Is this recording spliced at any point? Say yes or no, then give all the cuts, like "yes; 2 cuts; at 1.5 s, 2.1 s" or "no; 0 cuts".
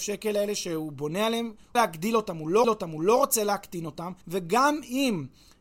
yes; 3 cuts; at 1.8 s, 2.6 s, 4.2 s